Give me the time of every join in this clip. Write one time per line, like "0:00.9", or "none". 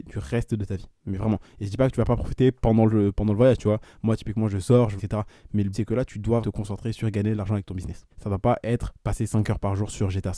0:05.0
0:05.7
0:06.4
0:08.1